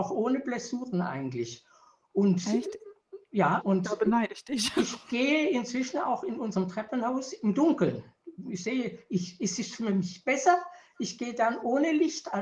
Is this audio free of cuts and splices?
no; 1 cut; at 3.6 s

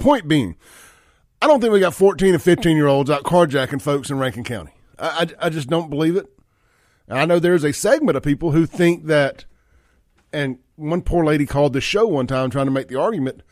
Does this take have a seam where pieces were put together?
no; 0 cuts

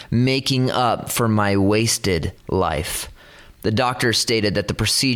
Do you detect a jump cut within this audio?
yes; 1 cut; at 2.4 s

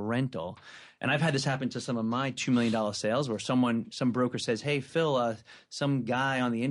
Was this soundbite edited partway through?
no; 0 cuts

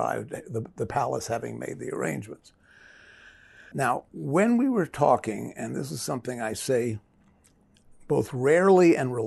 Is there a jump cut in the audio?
yes; 1 cut; at 4.1 s

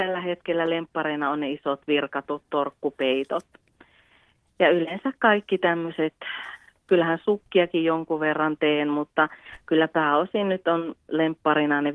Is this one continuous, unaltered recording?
yes; 0 cuts

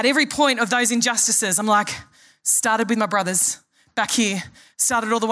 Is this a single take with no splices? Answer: yes; 0 cuts

